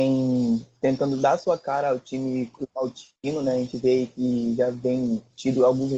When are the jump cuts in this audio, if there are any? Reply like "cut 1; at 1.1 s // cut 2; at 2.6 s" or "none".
none

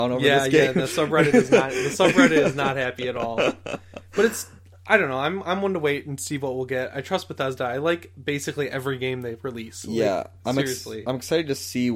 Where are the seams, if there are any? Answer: none

